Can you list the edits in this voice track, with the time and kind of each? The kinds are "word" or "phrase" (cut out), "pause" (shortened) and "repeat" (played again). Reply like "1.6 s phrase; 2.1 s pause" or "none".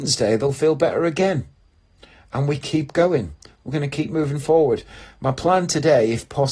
none